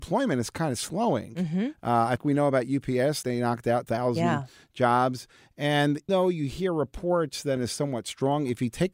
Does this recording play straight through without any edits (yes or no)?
no